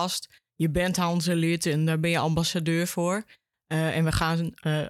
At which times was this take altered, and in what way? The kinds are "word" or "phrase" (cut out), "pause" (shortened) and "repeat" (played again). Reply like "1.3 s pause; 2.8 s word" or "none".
none